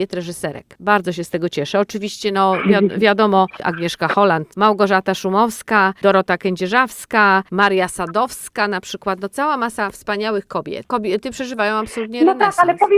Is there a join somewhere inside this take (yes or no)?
no